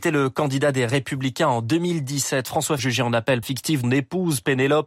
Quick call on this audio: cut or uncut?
cut